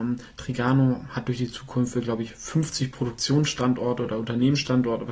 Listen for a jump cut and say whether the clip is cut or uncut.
uncut